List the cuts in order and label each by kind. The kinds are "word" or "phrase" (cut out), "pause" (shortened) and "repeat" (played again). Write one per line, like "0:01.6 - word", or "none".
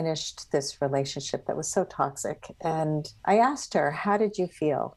0:03.2 - pause